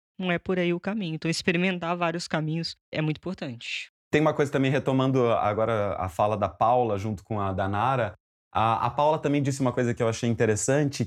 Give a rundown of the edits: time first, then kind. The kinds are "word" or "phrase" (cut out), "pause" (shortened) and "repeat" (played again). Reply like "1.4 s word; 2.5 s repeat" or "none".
none